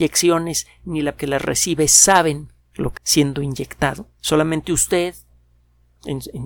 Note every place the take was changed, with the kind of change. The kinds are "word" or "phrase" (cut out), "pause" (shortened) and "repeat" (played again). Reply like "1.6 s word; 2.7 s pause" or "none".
1.2 s word; 2.6 s pause; 3.0 s word; 4.2 s pause